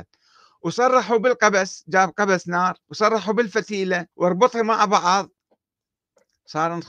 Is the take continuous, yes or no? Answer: no